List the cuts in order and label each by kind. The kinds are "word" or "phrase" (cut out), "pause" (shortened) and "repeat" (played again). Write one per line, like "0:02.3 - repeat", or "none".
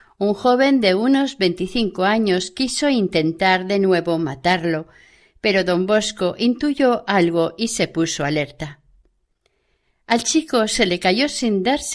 none